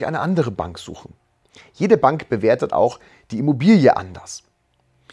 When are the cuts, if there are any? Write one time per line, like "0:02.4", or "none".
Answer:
none